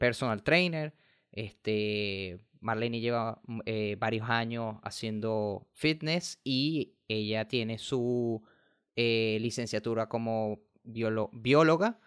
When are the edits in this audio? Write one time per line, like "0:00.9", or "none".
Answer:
none